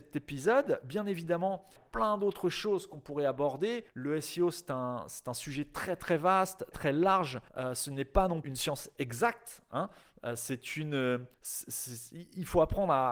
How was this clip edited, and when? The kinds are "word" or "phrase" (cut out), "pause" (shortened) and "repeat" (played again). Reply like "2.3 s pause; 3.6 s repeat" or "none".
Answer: 1.8 s phrase; 3.9 s pause; 6.7 s word; 7.5 s pause; 8.4 s word; 11.3 s pause